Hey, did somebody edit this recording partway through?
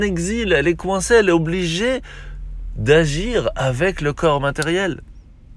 no; 0 cuts

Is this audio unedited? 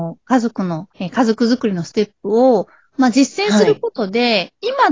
no; 1 cut; at 0.9 s

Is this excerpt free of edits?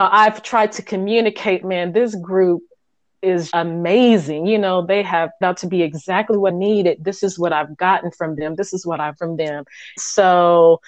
no; 6 cuts; at 1.6 s, 3.5 s, 5.4 s, 6.5 s, 9.2 s, 10.0 s

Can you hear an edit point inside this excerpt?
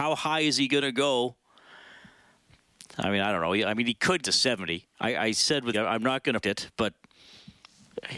yes; 3 cuts; at 4.2 s, 5.7 s, 6.4 s

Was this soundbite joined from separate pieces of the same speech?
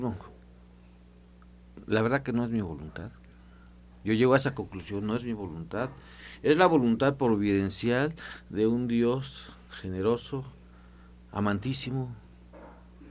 no; 0 cuts

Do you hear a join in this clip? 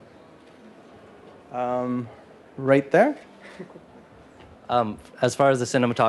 no; 0 cuts

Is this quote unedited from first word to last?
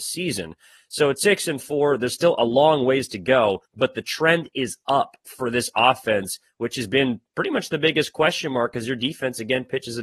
no; 1 cut; at 3.7 s

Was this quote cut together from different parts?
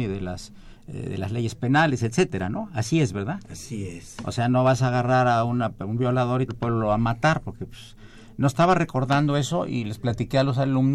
yes; 1 cut; at 6.5 s

